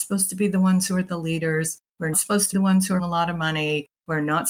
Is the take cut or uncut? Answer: cut